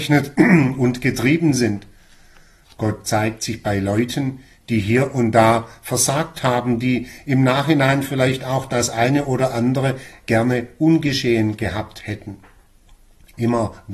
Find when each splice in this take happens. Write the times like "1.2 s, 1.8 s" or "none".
none